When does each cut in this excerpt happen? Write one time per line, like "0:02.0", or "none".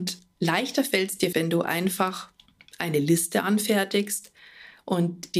0:01.3